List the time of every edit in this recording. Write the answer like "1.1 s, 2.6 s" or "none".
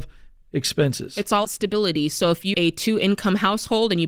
1.4 s, 2.5 s